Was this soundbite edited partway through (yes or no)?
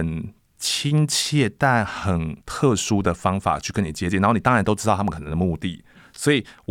yes